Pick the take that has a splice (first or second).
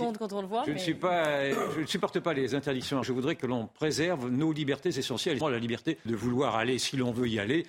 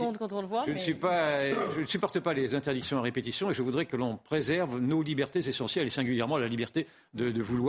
first